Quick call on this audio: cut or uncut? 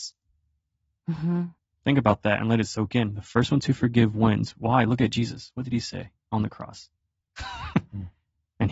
cut